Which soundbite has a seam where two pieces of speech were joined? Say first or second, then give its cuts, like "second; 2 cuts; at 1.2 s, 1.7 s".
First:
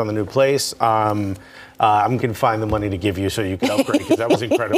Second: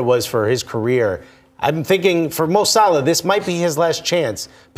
first; 1 cut; at 2.2 s